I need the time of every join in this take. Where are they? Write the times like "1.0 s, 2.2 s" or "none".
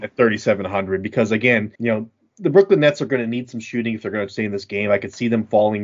1.7 s